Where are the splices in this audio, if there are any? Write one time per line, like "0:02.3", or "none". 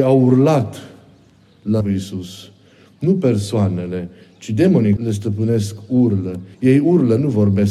0:01.8
0:05.0
0:06.5